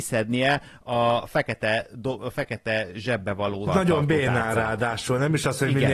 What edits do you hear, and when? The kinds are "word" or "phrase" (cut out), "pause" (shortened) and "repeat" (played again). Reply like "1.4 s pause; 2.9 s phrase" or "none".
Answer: 3.7 s word